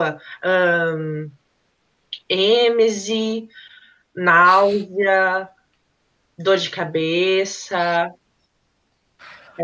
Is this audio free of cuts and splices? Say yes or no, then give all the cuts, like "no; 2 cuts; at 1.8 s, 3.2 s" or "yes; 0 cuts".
yes; 0 cuts